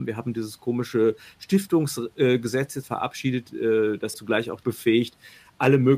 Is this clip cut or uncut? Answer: cut